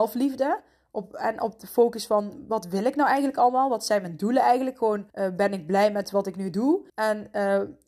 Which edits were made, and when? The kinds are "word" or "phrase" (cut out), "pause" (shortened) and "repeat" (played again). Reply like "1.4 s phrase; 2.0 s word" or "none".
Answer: 5.1 s pause; 6.9 s pause